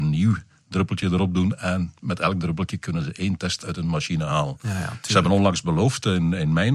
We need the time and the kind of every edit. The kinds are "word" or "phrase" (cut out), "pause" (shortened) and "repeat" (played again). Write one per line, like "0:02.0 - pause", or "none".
none